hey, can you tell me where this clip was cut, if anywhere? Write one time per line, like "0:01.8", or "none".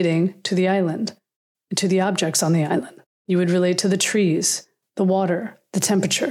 0:03.1